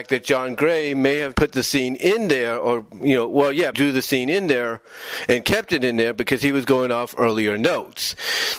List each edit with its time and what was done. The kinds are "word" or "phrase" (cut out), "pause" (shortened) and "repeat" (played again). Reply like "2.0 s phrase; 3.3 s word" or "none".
1.3 s word; 3.7 s word